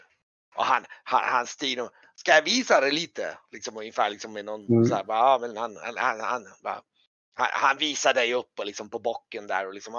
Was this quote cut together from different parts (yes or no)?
no